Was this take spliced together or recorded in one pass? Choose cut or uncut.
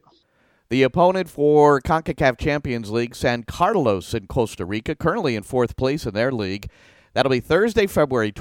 uncut